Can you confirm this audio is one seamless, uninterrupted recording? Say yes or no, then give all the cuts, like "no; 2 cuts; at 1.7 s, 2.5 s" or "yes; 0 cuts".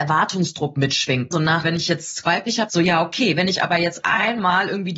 no; 3 cuts; at 1.6 s, 2.2 s, 2.7 s